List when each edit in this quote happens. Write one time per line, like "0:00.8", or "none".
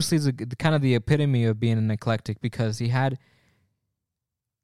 none